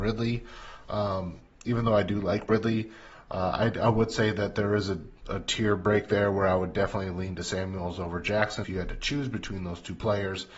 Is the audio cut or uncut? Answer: cut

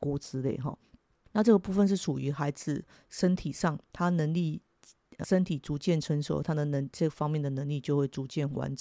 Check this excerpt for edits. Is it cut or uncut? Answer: cut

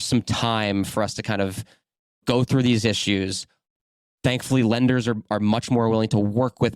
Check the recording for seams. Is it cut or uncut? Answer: uncut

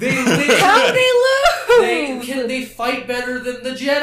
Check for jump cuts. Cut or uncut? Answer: cut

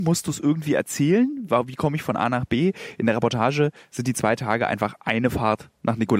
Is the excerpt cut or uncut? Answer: uncut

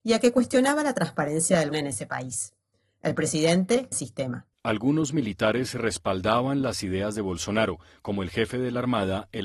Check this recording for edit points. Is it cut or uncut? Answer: cut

